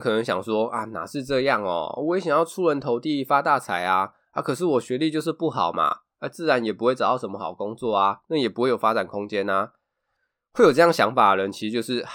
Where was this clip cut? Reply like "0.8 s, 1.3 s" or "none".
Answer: none